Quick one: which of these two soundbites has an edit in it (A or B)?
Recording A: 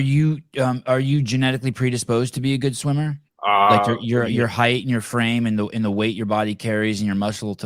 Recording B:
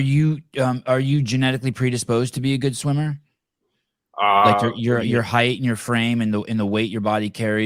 A